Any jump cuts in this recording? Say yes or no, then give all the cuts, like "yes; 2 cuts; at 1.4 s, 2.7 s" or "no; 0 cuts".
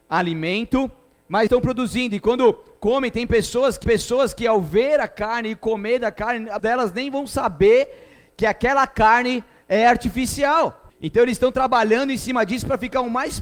yes; 4 cuts; at 1.5 s, 3.8 s, 6.6 s, 10.9 s